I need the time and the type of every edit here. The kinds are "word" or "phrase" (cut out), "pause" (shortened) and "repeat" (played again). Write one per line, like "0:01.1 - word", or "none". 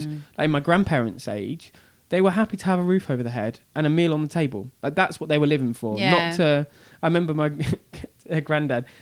none